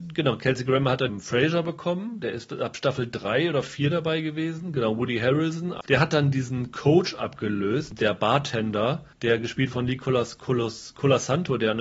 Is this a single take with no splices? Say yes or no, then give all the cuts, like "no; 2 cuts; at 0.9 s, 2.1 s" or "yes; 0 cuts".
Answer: no; 3 cuts; at 1.1 s, 9.1 s, 9.7 s